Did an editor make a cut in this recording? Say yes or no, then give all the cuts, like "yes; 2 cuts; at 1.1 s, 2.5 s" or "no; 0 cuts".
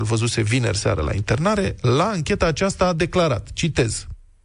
no; 0 cuts